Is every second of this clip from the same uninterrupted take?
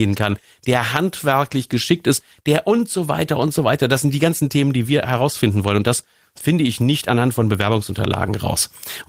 yes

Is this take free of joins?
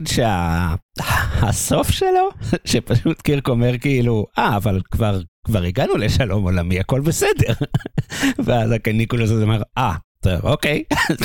yes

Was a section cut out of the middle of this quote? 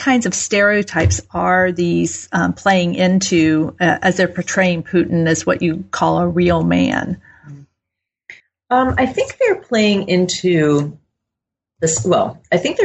yes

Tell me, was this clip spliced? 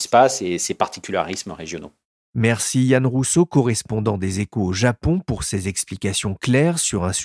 no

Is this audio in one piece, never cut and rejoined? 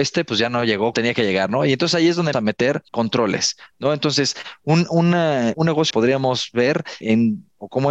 no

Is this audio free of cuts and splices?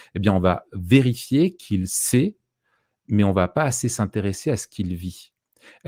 yes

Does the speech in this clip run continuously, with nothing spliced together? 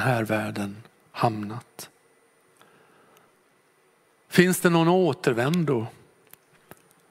yes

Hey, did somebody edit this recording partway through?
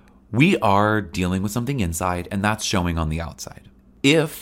no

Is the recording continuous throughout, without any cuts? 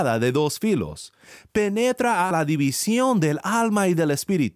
no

